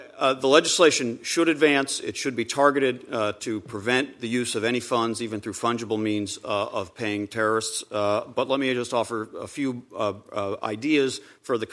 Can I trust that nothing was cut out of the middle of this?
yes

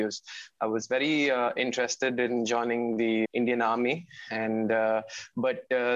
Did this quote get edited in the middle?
yes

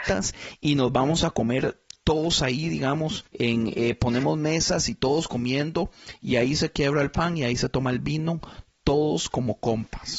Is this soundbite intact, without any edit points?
yes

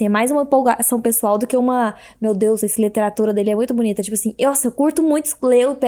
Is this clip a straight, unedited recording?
yes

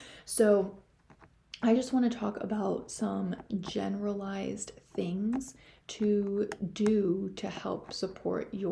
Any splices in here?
no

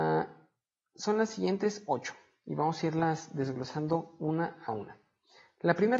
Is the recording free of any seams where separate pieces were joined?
yes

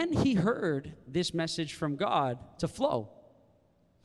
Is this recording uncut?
yes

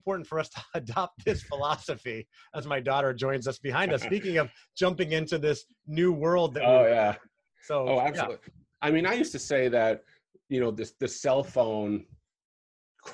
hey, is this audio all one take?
yes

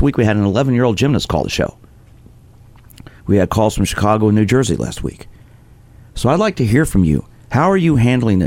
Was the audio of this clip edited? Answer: no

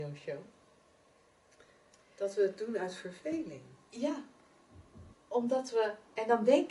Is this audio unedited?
no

